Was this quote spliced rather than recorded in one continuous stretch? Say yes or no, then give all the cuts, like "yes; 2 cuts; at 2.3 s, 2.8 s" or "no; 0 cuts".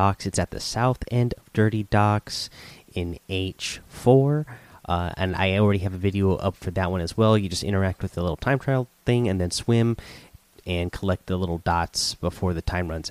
no; 0 cuts